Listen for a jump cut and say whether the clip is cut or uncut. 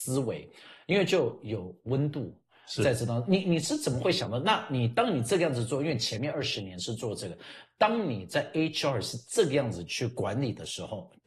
uncut